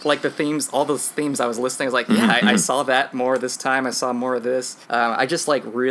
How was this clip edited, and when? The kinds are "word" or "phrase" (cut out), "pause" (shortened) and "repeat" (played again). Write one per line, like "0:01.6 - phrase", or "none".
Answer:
0:04.8 - pause